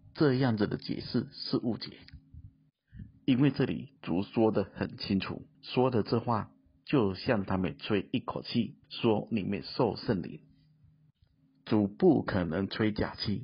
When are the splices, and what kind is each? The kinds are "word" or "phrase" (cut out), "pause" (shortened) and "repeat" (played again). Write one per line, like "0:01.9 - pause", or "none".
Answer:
0:04.0 - pause
0:05.5 - pause
0:08.8 - pause